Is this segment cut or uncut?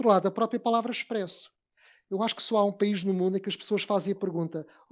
uncut